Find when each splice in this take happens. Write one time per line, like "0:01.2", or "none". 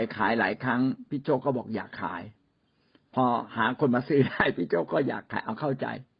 none